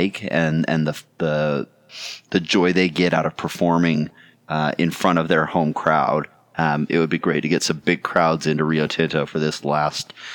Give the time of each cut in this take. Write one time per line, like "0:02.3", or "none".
none

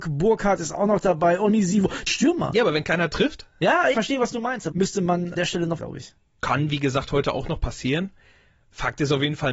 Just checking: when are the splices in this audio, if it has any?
0:02.1
0:03.9
0:04.7
0:05.4
0:05.8

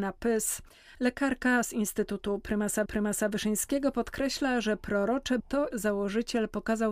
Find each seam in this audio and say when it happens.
0:02.9
0:05.4
0:05.7

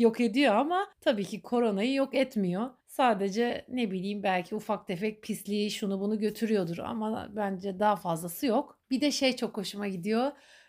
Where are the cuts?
0:00.9
0:02.8
0:08.8

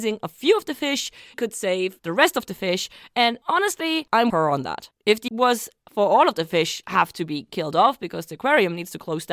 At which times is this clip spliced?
0:01.3
0:04.3
0:05.3
0:06.8

